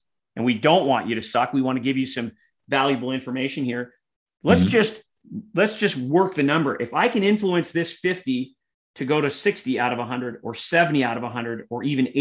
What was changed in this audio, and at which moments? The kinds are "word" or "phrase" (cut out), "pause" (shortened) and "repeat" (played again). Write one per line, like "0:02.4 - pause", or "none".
none